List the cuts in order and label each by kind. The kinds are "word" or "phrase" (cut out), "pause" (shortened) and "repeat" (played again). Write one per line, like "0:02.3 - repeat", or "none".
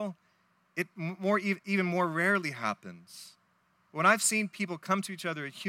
0:03.6 - pause